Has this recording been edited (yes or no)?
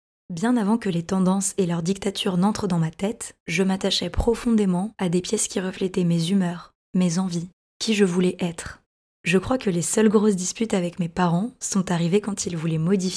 no